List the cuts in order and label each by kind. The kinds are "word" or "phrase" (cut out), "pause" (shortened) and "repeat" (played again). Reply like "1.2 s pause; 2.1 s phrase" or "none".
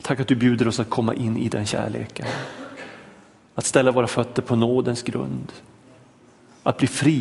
none